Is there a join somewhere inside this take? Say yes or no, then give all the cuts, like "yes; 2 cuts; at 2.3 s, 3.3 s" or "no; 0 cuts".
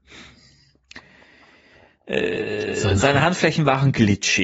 no; 0 cuts